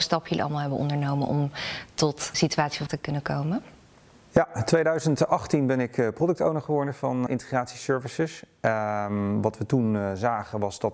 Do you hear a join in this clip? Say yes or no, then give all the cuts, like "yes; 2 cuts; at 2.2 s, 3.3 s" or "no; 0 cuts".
yes; 3 cuts; at 2.3 s, 2.9 s, 7.3 s